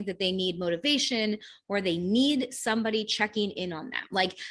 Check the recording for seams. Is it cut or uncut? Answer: uncut